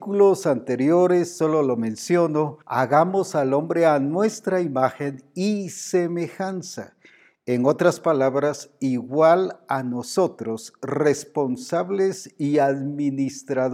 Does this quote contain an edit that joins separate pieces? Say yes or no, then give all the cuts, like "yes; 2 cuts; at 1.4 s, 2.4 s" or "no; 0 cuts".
yes; 1 cut; at 2.6 s